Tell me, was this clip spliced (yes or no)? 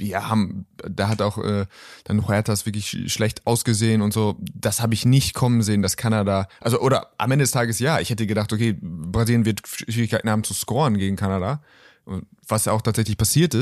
no